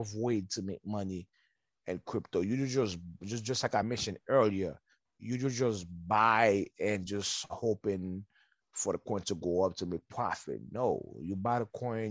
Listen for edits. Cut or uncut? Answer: uncut